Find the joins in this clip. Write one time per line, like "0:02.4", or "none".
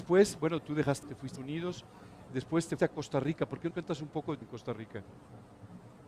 0:01.0
0:01.4
0:02.8
0:03.7
0:04.4